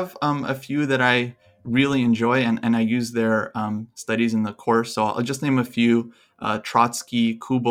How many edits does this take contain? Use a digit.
0